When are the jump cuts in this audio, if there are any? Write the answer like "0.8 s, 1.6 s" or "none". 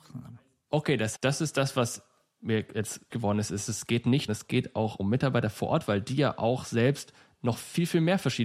1.1 s, 3.1 s, 4.3 s

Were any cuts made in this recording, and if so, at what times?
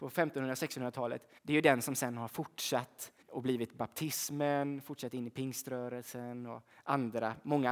1.4 s, 3.2 s

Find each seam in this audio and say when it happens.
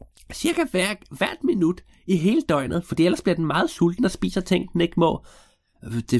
none

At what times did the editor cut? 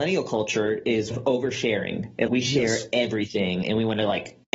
1.1 s, 2.3 s

